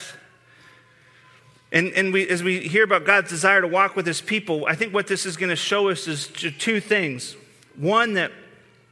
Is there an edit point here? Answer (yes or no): no